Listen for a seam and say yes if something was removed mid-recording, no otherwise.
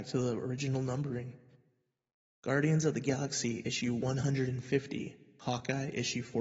no